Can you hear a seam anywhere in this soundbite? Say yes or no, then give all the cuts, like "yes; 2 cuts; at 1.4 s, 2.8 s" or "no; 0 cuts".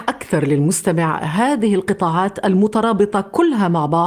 no; 0 cuts